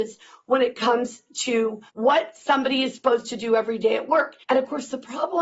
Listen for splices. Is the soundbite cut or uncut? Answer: cut